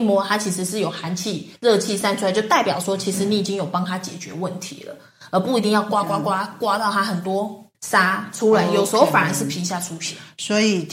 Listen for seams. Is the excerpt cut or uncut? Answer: cut